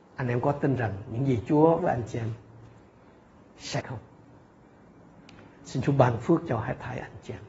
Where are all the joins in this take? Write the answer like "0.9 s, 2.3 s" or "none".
1.8 s, 3.8 s